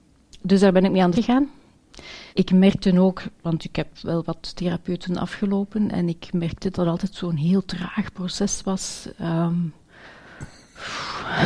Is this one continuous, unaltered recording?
no; 4 cuts; at 1.1 s, 2.3 s, 3.9 s, 6.7 s

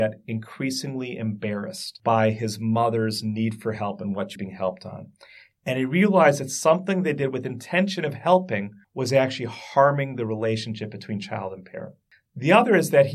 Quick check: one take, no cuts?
no; 2 cuts; at 4.4 s, 8.8 s

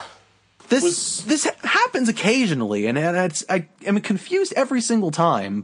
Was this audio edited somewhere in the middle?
yes; 1 cut; at 3.7 s

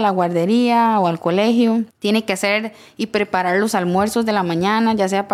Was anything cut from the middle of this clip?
yes; 1 cut; at 1.9 s

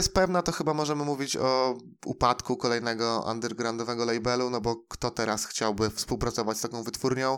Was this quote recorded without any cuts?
yes; 0 cuts

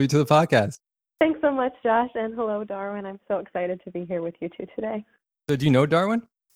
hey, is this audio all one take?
no; 1 cut; at 5.2 s

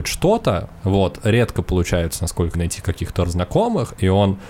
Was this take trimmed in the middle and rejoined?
yes; 2 cuts; at 2.5 s, 3.2 s

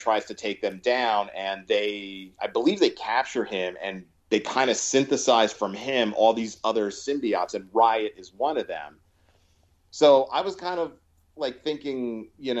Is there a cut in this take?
no; 0 cuts

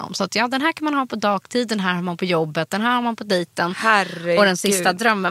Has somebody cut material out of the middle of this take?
no; 0 cuts

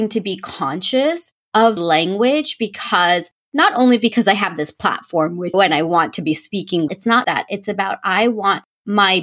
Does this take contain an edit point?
yes; 4 cuts; at 1.8 s, 5.5 s, 6.9 s, 7.2 s

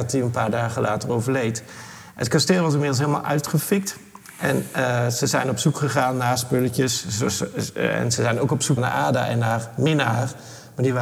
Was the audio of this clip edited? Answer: yes; 1 cut; at 8.8 s

